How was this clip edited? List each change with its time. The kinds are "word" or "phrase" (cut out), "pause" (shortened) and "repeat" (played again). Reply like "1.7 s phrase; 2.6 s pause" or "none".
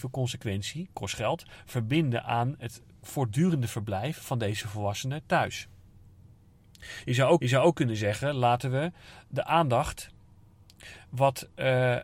7.4 s repeat